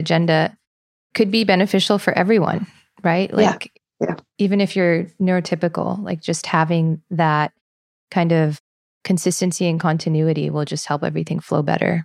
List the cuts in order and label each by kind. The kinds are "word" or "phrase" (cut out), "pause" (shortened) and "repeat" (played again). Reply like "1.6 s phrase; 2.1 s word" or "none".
none